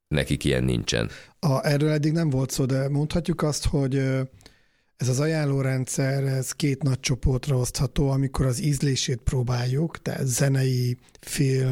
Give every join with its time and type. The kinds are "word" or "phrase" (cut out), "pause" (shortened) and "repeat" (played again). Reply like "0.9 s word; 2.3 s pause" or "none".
none